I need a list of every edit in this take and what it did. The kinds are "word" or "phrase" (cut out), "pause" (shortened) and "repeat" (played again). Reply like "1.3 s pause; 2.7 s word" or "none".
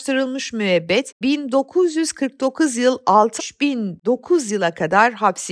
1.2 s word; 3.4 s word